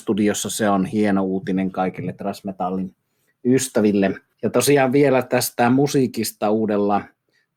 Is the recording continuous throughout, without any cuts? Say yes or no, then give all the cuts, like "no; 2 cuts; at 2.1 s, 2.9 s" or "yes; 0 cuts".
yes; 0 cuts